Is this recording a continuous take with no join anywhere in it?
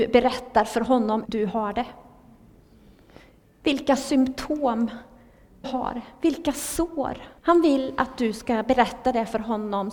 no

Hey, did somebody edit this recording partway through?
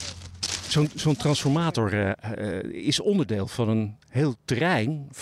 no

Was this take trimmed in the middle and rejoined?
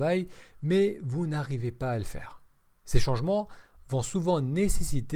yes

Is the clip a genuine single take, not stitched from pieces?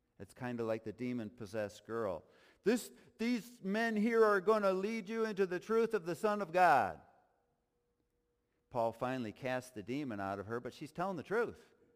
yes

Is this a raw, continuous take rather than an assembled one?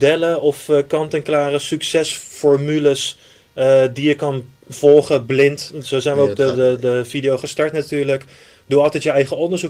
yes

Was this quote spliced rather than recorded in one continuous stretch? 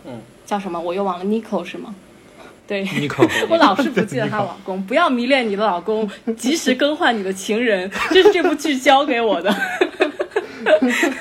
yes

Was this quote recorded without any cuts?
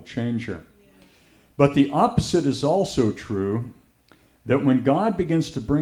yes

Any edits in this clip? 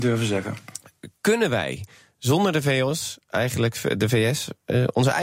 no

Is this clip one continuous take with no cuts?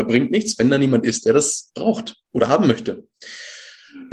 yes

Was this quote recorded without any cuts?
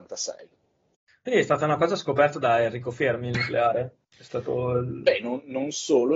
no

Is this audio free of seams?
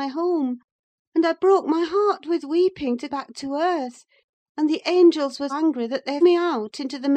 no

